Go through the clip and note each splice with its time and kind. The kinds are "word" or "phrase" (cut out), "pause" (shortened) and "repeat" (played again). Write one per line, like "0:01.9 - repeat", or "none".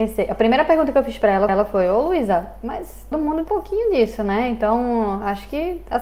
0:01.5 - repeat
0:03.1 - word
0:03.5 - word